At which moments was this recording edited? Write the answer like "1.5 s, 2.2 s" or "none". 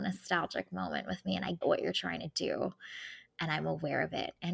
1.6 s